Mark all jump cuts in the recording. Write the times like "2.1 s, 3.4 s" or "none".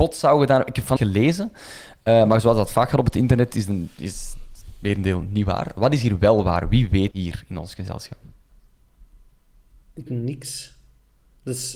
1.0 s, 7.1 s, 10.1 s

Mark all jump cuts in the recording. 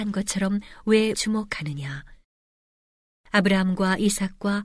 1.1 s

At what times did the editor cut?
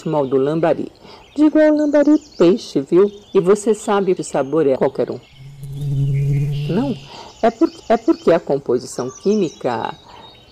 3.2 s, 4.2 s, 4.8 s, 7.8 s

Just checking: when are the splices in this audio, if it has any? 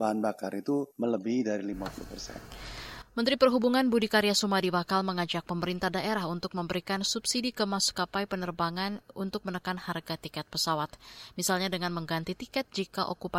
0.9 s

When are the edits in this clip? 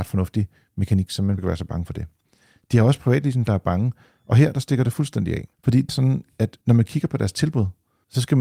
1.4 s, 3.5 s, 5.5 s, 5.9 s, 6.6 s

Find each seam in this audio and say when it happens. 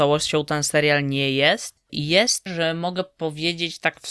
2.5 s

